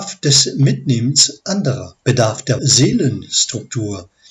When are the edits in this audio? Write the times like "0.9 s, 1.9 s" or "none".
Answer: 2.0 s, 2.6 s